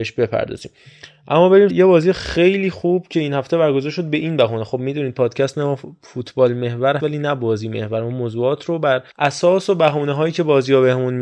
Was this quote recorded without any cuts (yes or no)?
no